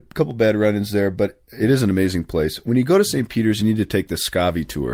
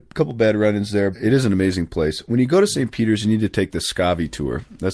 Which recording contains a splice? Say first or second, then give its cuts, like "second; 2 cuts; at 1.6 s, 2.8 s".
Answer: second; 1 cut; at 1.1 s